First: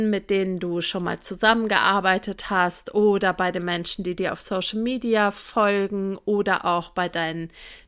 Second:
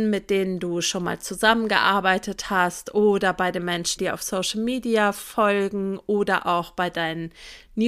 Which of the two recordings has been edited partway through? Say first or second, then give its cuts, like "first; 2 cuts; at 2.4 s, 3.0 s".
second; 1 cut; at 4.0 s